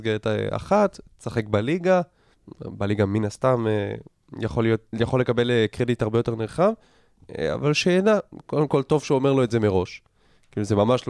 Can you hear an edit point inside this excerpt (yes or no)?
no